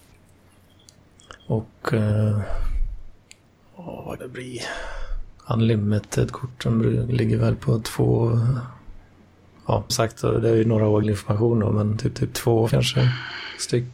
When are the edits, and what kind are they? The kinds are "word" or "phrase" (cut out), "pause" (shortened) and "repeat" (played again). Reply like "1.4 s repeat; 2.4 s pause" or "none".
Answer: 1.4 s pause; 3.4 s pause; 4.2 s word; 5.4 s pause; 9.9 s word; 11.0 s word; 12.2 s repeat; 12.7 s word